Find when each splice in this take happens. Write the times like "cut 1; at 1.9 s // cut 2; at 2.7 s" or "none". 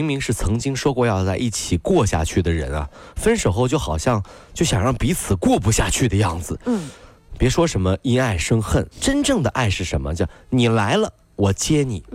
cut 1; at 8.9 s